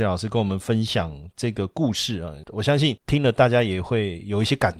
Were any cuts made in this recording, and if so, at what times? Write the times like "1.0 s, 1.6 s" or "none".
none